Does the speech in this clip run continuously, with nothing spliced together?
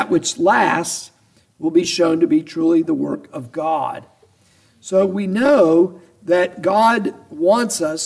yes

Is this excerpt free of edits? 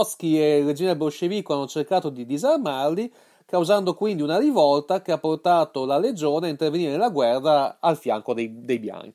yes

